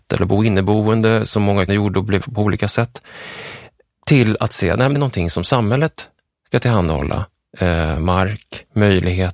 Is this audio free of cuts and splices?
no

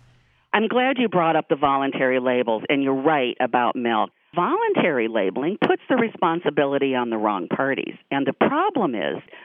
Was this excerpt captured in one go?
yes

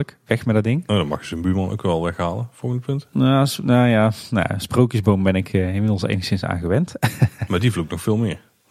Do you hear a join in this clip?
no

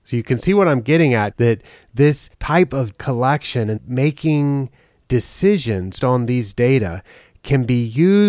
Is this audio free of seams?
no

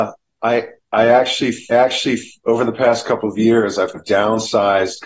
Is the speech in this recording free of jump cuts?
no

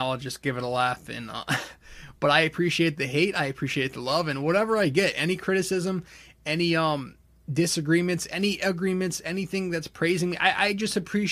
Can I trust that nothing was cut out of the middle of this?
yes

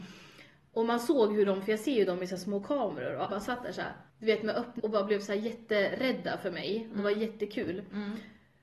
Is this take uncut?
no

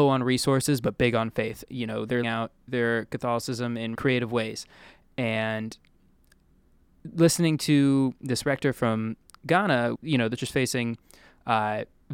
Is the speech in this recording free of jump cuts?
no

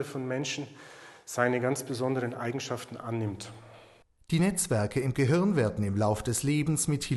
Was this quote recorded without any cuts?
yes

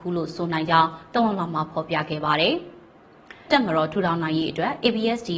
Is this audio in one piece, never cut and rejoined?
no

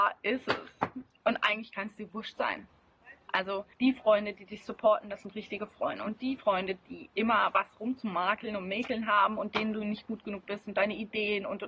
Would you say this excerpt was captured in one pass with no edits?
no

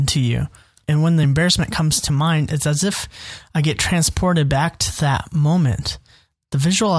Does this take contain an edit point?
no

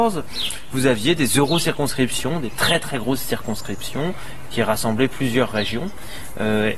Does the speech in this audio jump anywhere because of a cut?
no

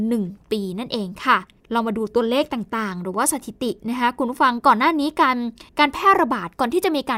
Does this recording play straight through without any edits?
no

